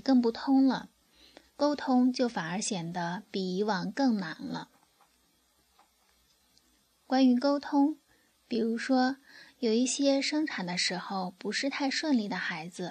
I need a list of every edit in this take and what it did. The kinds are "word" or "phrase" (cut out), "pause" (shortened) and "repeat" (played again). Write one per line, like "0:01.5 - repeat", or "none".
none